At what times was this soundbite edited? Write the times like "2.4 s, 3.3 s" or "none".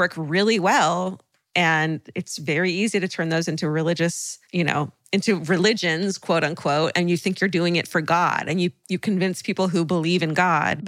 none